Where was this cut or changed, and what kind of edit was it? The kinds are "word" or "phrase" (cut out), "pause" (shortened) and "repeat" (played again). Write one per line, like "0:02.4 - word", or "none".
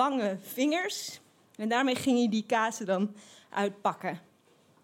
none